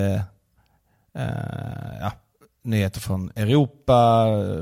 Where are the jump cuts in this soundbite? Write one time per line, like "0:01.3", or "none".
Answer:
none

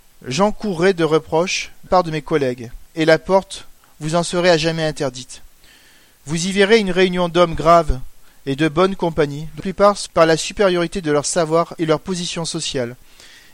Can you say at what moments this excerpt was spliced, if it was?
0:01.9
0:09.6
0:10.1
0:11.8

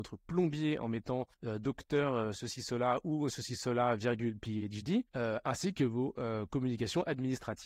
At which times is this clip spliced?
0:01.3
0:05.1

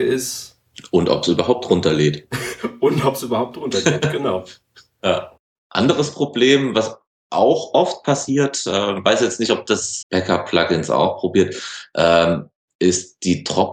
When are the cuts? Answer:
0:10.0

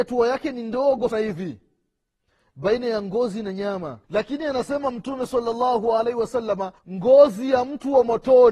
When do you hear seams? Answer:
0:01.1
0:04.0
0:06.8

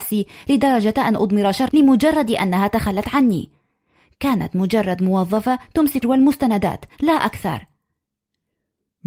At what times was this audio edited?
0:01.7
0:06.0

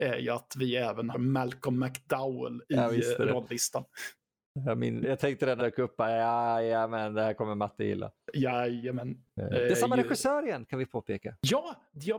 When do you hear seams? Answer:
0:01.1
0:05.0
0:05.6

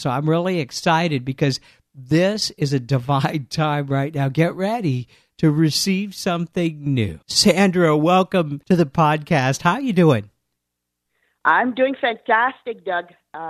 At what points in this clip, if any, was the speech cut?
0:07.2

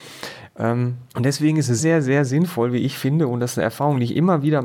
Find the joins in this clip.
0:01.1
0:01.8

